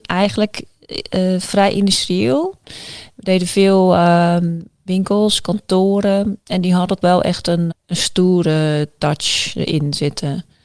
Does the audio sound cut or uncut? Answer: cut